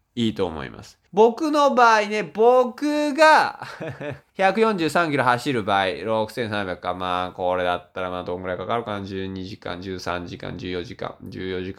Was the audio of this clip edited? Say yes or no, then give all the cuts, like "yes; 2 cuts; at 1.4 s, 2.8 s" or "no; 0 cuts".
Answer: yes; 2 cuts; at 1.1 s, 4.3 s